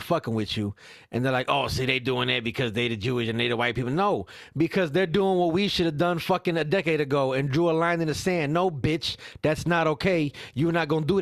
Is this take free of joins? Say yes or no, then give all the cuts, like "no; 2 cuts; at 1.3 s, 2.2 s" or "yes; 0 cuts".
yes; 0 cuts